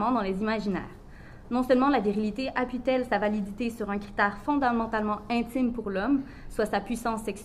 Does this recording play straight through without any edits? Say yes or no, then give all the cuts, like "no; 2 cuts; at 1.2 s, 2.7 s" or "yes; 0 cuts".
yes; 0 cuts